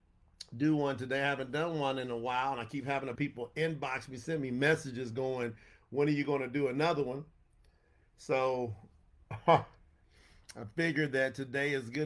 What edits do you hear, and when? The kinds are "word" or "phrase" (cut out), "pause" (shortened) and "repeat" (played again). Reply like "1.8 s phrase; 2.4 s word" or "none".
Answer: 3.2 s phrase

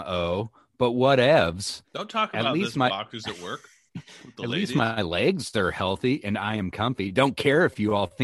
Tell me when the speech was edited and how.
1.8 s pause; 3.9 s pause

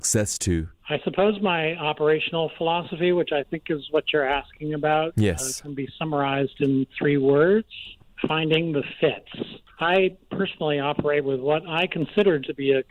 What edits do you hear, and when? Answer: 9.7 s pause

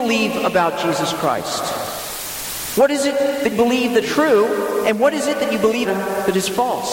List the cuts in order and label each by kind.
3.5 s word; 4.0 s word; 5.8 s word

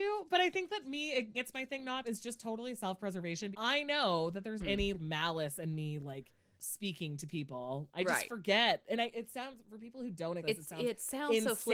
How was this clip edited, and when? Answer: 1.3 s word; 2.0 s word; 3.5 s word; 4.6 s word; 4.9 s word; 6.6 s word; 10.4 s word

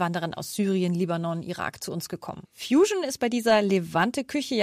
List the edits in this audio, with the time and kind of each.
2.4 s pause

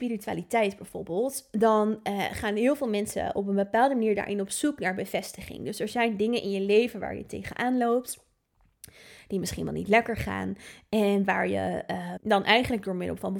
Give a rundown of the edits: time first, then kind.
12.2 s word

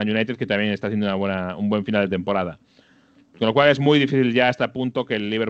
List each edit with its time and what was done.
none

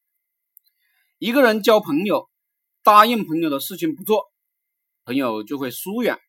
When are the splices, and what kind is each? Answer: none

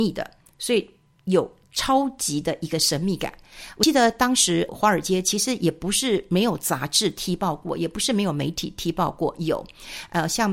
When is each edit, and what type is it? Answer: 4.7 s word

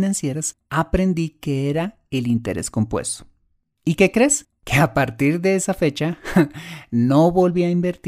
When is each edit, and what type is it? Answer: none

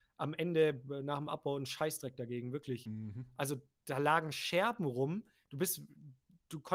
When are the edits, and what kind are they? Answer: none

